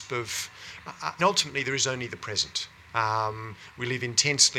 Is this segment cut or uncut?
cut